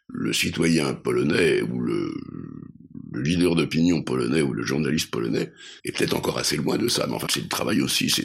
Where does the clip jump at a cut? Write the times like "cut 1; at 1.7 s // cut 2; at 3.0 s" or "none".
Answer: cut 1; at 5.8 s // cut 2; at 7.3 s